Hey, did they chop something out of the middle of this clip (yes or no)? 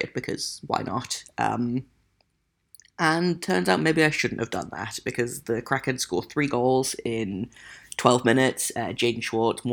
no